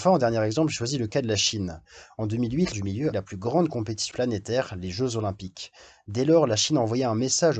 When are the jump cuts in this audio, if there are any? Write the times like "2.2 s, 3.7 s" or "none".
2.7 s, 3.1 s, 4.1 s